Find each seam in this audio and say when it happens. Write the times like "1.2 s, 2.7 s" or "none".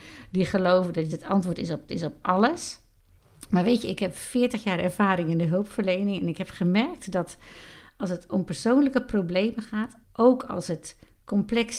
1.1 s, 1.9 s, 10.0 s